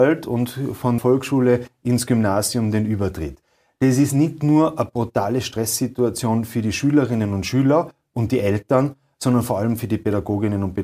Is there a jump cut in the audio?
yes; 1 cut; at 1.0 s

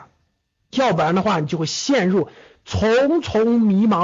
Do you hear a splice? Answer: no; 0 cuts

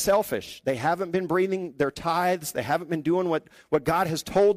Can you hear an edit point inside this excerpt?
no; 0 cuts

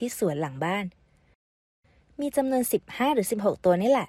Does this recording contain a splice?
yes; 1 cut; at 1.7 s

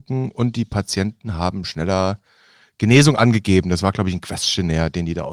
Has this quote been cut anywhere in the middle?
no; 0 cuts

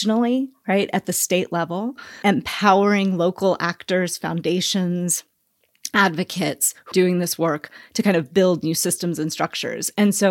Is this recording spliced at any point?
yes; 2 cuts; at 2.2 s, 6.9 s

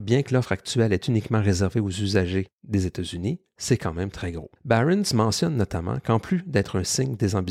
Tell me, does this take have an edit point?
yes; 1 cut; at 4.6 s

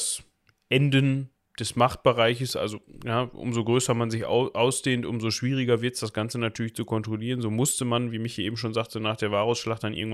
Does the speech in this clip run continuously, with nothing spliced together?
yes; 0 cuts

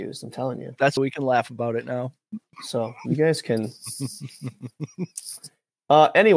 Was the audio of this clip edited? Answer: yes; 1 cut; at 1.0 s

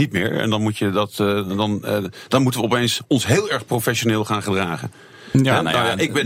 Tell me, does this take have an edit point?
no; 0 cuts

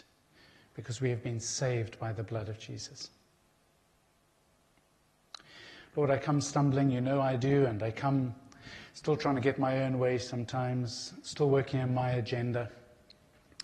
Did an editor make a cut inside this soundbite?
no; 0 cuts

